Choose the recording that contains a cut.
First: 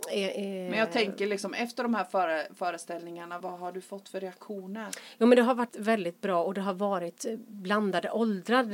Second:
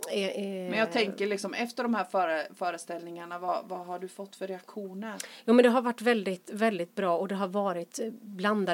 first; 2 cuts; at 3.4 s, 5.7 s

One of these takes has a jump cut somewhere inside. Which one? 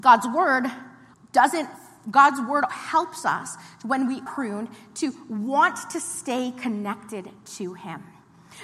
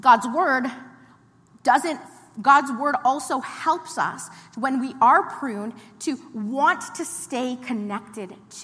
first; 3 cuts; at 1.1 s, 2.7 s, 4.3 s

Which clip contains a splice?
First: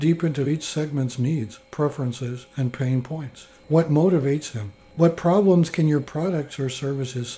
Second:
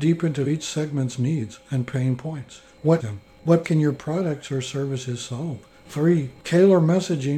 second; 3 cuts; at 1.6 s, 3.0 s, 3.6 s

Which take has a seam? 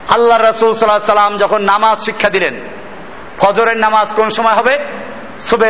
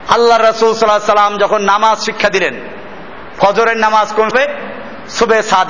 second; 1 cut; at 4.3 s

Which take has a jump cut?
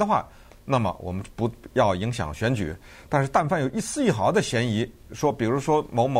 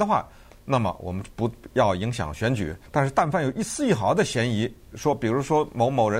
second; 1 cut; at 2.9 s

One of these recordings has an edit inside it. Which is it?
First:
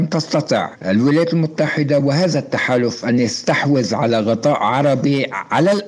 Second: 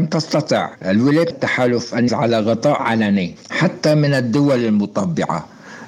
second; 3 cuts; at 1.3 s, 2.1 s, 2.8 s

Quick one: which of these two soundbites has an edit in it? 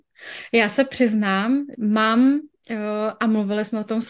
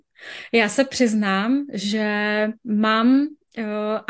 first; 1 cut; at 1.7 s

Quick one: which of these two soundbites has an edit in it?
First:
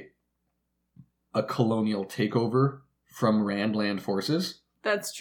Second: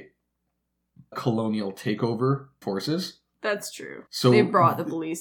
second; 3 cuts; at 1.1 s, 2.6 s, 4.1 s

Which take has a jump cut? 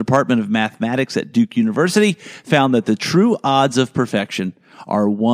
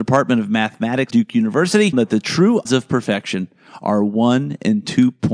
second; 3 cuts; at 1.1 s, 1.9 s, 2.6 s

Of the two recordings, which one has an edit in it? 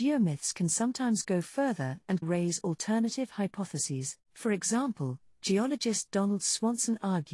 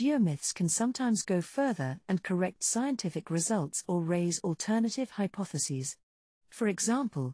first; 2 cuts; at 2.2 s, 4.2 s

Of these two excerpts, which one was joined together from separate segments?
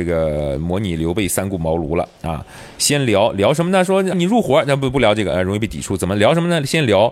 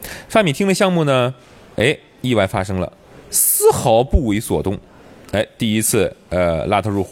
first; 1 cut; at 4.1 s

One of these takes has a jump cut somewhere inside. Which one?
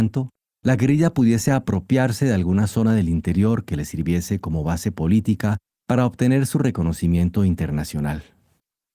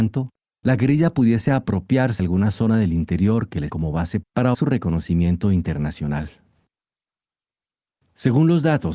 second; 4 cuts; at 2.2 s, 3.7 s, 4.2 s, 4.5 s

